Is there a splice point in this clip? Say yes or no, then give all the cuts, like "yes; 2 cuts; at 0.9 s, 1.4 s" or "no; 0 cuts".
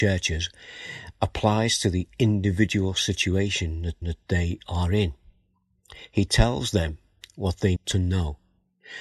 yes; 2 cuts; at 4.0 s, 7.8 s